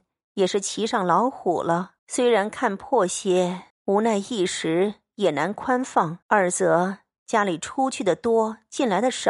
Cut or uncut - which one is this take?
cut